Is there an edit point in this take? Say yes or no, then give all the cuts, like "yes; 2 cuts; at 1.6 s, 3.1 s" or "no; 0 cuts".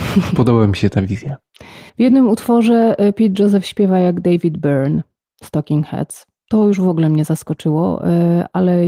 yes; 1 cut; at 1.9 s